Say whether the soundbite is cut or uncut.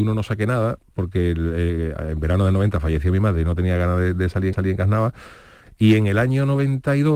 cut